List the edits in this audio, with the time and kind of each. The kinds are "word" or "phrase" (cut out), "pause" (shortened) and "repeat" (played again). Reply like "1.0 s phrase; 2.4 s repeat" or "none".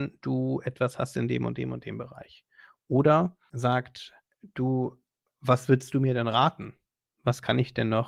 none